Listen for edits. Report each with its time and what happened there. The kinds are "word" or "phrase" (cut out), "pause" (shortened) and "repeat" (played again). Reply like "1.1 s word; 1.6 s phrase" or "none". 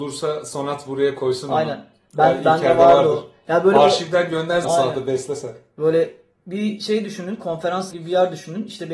4.6 s word; 7.9 s word